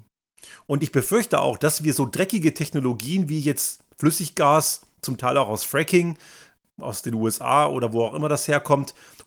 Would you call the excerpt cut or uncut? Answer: uncut